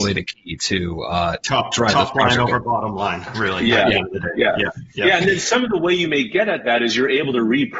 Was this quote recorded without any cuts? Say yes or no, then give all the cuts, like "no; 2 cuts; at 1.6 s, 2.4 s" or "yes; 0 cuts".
yes; 0 cuts